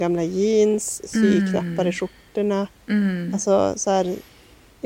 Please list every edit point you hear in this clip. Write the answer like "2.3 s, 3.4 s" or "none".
none